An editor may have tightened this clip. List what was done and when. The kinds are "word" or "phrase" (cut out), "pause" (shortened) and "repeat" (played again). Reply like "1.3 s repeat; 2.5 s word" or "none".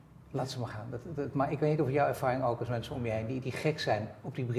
none